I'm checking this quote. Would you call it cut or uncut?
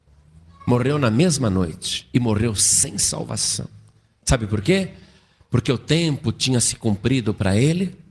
cut